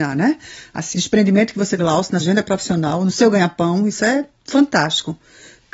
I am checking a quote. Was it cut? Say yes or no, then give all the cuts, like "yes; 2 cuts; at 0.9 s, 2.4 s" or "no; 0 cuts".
yes; 3 cuts; at 0.9 s, 1.8 s, 2.2 s